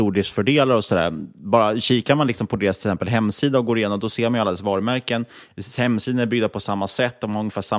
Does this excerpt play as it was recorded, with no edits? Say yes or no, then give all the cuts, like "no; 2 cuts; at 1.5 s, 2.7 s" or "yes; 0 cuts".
yes; 0 cuts